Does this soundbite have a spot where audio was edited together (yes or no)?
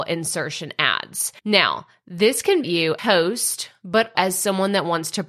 yes